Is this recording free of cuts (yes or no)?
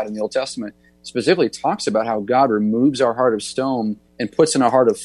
no